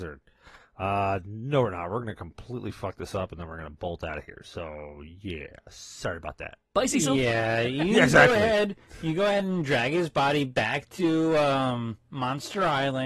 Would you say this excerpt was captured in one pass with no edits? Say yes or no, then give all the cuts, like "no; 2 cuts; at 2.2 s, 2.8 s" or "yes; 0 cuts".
yes; 0 cuts